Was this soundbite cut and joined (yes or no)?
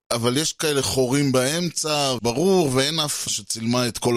yes